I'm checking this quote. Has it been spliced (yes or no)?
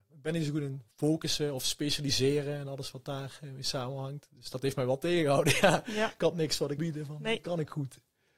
yes